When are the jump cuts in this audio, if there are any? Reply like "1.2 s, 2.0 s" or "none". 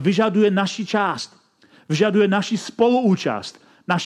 none